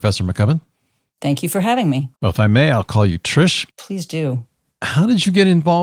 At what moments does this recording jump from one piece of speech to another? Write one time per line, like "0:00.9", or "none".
0:02.1
0:03.7

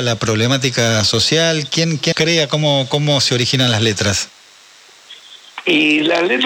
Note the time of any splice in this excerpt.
0:02.1

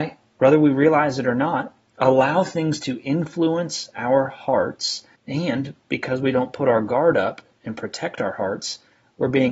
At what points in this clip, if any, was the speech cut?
0:05.2

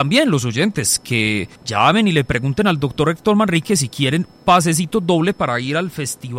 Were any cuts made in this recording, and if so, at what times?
0:01.6

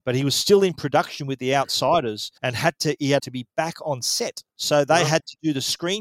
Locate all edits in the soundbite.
0:02.4
0:03.2
0:04.5

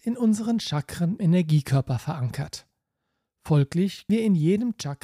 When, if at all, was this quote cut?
0:01.2
0:04.1

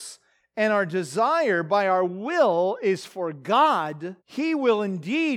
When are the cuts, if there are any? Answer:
0:04.2

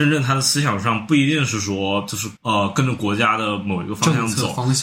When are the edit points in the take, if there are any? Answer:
0:02.4

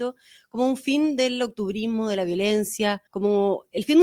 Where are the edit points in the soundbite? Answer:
0:03.1

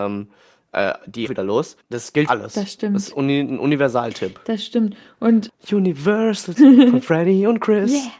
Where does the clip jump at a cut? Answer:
0:01.2
0:01.8
0:02.3
0:06.6

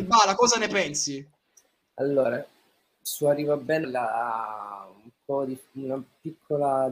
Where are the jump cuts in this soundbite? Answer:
0:03.8

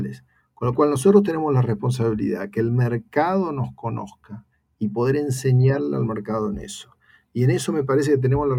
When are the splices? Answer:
none

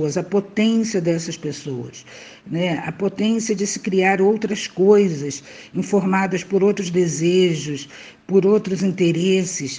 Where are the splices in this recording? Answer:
none

